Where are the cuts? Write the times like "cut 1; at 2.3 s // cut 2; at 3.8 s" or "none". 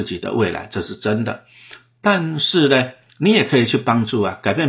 cut 1; at 3.1 s

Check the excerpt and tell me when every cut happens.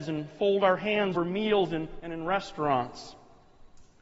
cut 1; at 1.1 s // cut 2; at 2.0 s

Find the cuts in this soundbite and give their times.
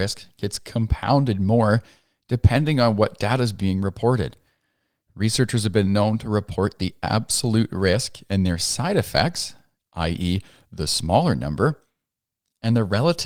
none

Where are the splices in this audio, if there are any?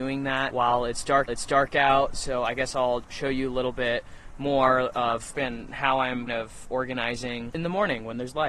cut 1; at 1.3 s // cut 2; at 3.0 s // cut 3; at 5.3 s // cut 4; at 6.3 s

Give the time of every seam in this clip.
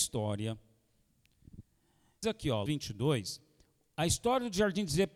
cut 1; at 2.2 s // cut 2; at 2.7 s

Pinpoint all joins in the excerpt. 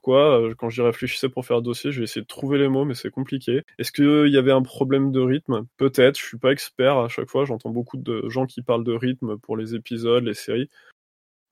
cut 1; at 5.7 s

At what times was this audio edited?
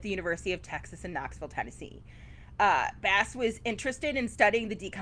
none

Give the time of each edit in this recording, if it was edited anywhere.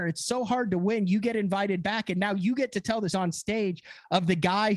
cut 1; at 3.1 s

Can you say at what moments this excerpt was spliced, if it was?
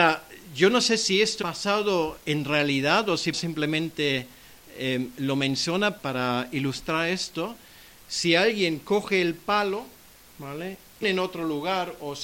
cut 1; at 1.4 s // cut 2; at 3.3 s // cut 3; at 6.0 s // cut 4; at 11.0 s

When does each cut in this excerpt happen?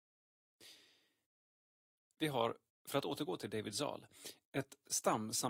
none

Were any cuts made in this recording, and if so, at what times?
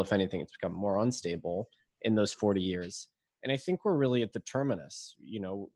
none

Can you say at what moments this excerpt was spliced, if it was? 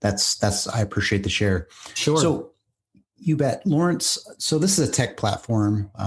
none

